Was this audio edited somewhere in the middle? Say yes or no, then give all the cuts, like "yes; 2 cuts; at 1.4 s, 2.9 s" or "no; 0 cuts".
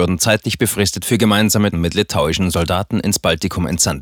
yes; 1 cut; at 1.7 s